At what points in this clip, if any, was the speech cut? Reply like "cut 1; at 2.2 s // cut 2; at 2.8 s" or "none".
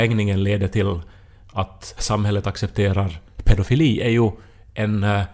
none